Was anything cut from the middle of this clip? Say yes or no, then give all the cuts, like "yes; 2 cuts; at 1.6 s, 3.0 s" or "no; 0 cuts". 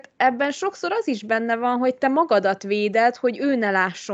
no; 0 cuts